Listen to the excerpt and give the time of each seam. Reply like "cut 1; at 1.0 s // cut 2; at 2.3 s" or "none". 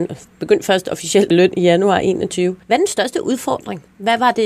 cut 1; at 1.3 s // cut 2; at 2.6 s